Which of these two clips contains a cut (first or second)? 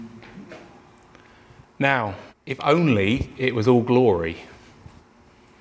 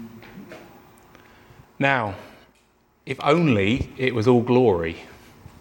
first